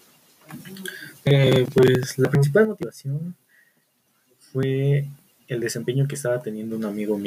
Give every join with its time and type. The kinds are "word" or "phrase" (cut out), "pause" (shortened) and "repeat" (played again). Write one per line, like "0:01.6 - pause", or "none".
none

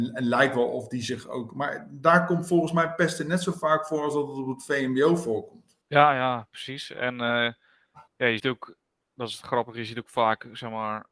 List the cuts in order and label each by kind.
0:05.8 - pause
0:08.1 - pause
0:08.4 - word

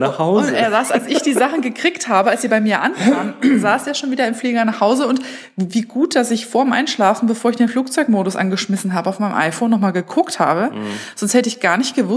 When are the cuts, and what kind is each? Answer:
none

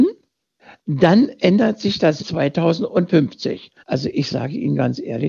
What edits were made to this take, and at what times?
0:02.2 - word
0:03.8 - pause

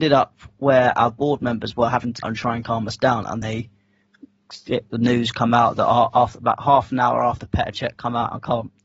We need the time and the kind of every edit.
0:02.2 - phrase
0:03.4 - word

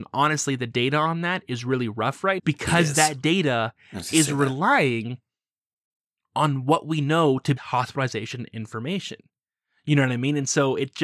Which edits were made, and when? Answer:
0:02.4 - word
0:07.6 - phrase

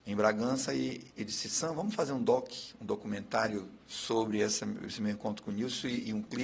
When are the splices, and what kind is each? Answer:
0:01.1 - pause

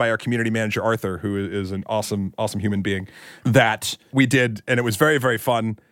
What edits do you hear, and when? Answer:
none

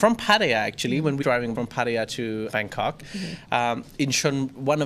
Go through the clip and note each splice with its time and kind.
0:01.2 - word
0:01.5 - word
0:02.5 - word

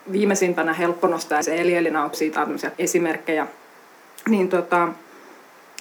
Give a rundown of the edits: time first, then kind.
0:01.4 - word
0:02.1 - word
0:02.7 - word

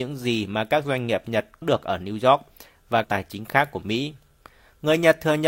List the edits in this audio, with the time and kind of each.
0:01.6 - word
0:03.0 - phrase
0:04.4 - pause

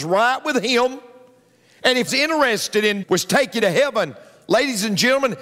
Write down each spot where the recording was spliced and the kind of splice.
0:02.1 - phrase
0:03.0 - word
0:03.6 - word

